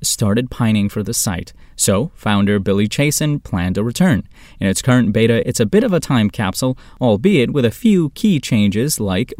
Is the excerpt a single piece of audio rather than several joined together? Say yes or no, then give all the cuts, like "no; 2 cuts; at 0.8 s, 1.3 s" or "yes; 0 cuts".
no; 1 cut; at 5.4 s